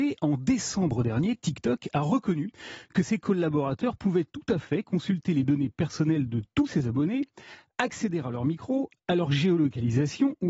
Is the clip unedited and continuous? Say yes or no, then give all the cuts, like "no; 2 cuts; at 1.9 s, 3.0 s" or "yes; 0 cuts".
yes; 0 cuts